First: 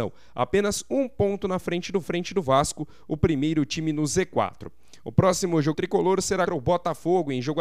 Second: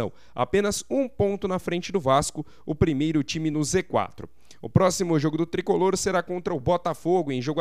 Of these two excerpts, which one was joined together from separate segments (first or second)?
first